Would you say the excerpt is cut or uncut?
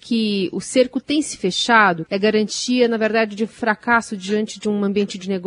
cut